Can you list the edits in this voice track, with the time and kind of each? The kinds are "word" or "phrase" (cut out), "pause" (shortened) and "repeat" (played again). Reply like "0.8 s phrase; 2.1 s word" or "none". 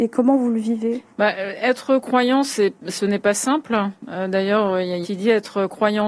1.1 s pause; 5.0 s phrase